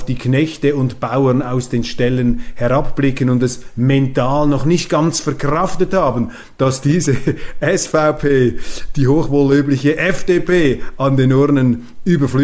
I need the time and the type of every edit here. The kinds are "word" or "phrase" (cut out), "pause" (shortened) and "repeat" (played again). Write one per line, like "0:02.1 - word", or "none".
none